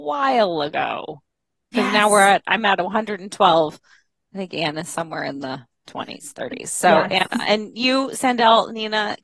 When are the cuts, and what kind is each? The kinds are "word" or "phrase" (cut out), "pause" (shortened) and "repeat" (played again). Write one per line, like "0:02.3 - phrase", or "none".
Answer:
none